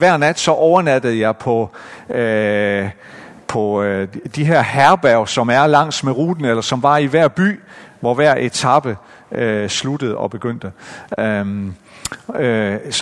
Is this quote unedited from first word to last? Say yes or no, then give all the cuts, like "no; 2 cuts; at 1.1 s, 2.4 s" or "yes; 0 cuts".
yes; 0 cuts